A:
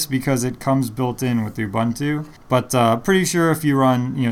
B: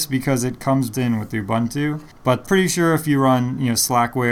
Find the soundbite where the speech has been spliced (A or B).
B